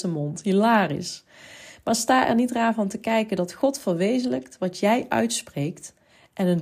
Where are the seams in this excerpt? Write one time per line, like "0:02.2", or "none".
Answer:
none